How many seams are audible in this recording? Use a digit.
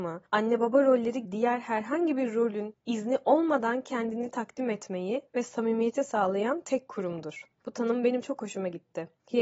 1